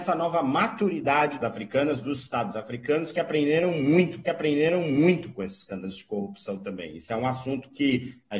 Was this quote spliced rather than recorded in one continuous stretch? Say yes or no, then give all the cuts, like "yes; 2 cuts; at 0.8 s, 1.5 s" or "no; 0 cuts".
yes; 2 cuts; at 1.4 s, 4.2 s